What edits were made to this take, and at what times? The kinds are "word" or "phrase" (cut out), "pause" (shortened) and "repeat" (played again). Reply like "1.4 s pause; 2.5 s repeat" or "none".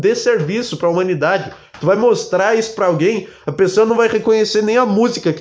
none